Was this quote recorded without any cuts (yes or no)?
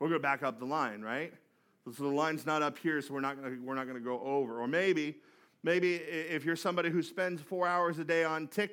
yes